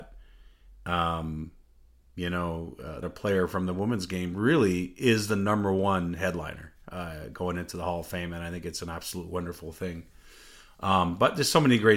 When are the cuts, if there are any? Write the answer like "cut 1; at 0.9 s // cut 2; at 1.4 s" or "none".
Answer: cut 1; at 3.0 s